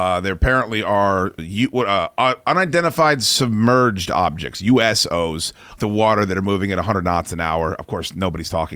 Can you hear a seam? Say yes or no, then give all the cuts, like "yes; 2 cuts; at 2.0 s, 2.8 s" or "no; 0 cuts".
yes; 2 cuts; at 1.4 s, 5.8 s